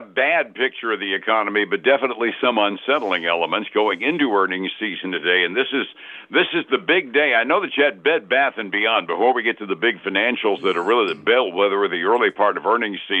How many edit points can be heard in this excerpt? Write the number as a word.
zero